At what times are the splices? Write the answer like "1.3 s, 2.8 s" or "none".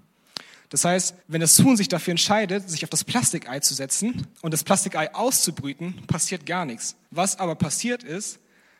1.2 s, 4.3 s, 7.0 s